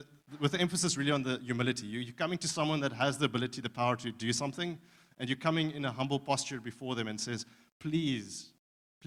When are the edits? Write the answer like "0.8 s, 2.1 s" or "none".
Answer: none